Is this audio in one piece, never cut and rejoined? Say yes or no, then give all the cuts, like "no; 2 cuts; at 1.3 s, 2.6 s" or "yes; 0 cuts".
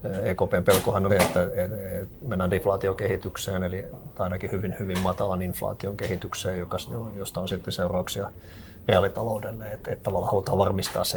no; 1 cut; at 1.1 s